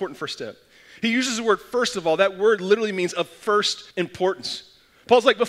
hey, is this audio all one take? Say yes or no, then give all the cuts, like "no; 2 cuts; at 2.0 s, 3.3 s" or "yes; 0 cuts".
no; 1 cut; at 3.9 s